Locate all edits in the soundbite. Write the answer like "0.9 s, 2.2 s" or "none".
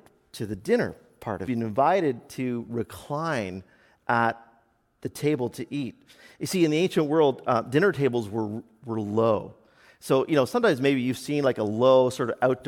1.5 s